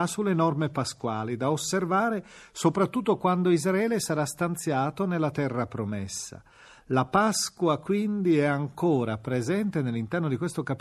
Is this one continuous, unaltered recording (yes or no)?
yes